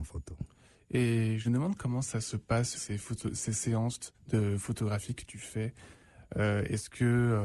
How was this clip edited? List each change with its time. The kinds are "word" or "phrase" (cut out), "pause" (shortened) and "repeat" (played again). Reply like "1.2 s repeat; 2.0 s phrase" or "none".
1.4 s phrase; 2.7 s word; 4.1 s pause